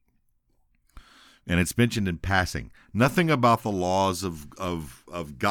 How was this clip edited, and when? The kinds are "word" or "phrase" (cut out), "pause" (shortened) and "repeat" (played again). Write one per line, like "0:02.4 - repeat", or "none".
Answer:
0:01.3 - pause

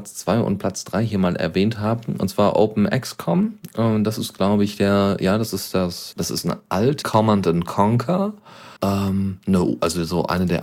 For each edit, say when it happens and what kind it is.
0:06.1 - word
0:07.0 - phrase
0:08.8 - pause

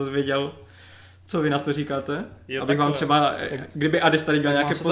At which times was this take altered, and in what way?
none

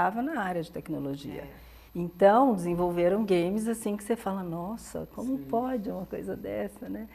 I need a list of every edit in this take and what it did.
0:01.9 - pause

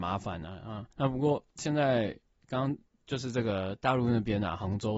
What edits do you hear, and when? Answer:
0:00.9 - pause

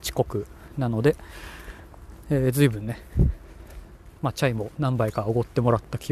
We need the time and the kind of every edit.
0:04.2 - pause

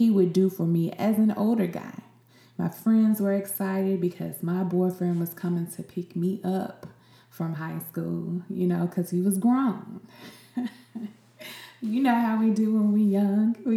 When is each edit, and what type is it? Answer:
none

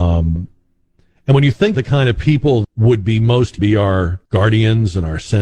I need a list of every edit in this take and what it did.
0:01.7 - word
0:02.6 - word
0:03.6 - phrase
0:04.3 - pause

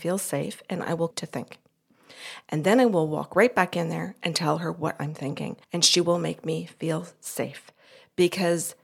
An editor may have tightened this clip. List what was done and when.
0:01.1 - word
0:05.6 - pause

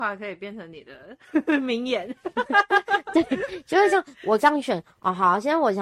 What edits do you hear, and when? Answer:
none

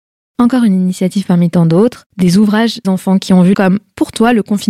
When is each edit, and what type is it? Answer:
0:02.1 - pause
0:02.8 - phrase
0:03.5 - phrase

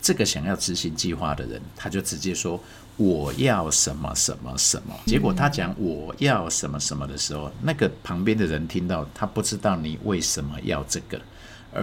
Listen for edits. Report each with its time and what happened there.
0:05.1 - word

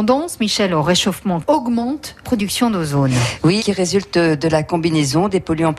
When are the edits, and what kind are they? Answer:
0:01.4 - word
0:02.2 - word
0:03.6 - word

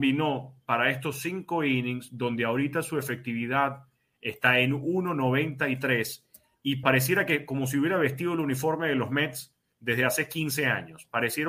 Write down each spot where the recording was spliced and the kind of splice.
0:06.8 - phrase

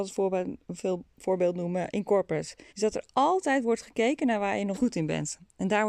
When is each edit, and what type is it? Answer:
0:02.7 - pause
0:04.7 - word

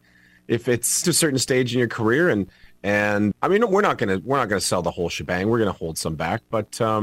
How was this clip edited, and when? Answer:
0:01.0 - phrase
0:03.3 - word

